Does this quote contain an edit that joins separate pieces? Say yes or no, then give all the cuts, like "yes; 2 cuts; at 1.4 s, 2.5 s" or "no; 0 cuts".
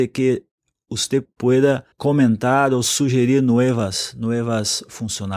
yes; 1 cut; at 1.9 s